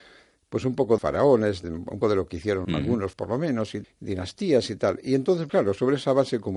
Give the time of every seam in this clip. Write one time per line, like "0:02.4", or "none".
0:01.0
0:01.6
0:02.0
0:02.6
0:03.1
0:03.8
0:05.5